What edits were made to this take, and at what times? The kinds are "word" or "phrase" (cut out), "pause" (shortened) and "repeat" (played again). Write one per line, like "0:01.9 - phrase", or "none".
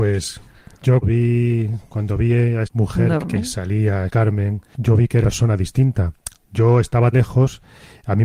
0:01.0 - word
0:02.6 - word
0:03.2 - word
0:04.1 - word
0:04.7 - word
0:05.2 - word
0:07.1 - word

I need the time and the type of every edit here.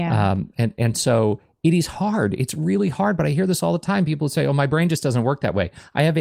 none

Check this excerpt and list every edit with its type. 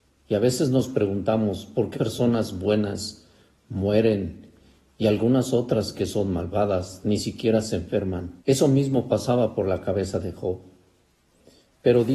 0:01.9 - word
0:08.4 - pause

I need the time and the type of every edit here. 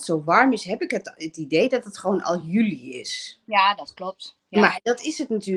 none

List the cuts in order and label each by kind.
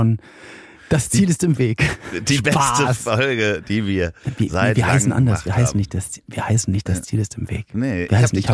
none

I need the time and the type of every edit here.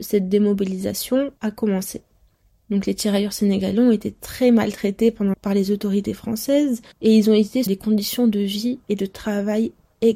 0:01.4 - pause
0:05.3 - word
0:06.9 - pause
0:07.7 - phrase

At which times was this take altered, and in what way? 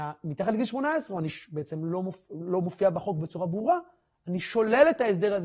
none

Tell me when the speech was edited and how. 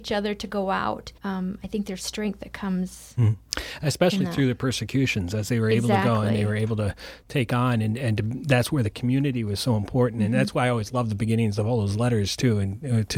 0:01.2 - pause

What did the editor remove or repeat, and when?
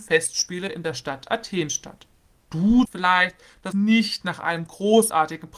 0:02.9 - phrase
0:03.7 - phrase

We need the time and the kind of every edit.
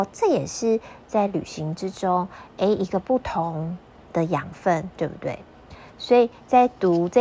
0:04.9 - pause

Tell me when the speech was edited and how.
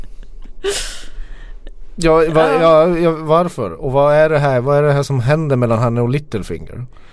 none

